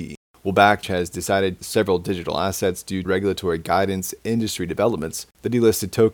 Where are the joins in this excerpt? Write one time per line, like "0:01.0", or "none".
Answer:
0:01.6
0:03.0
0:04.2